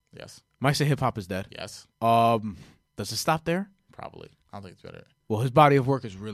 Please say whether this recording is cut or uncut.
cut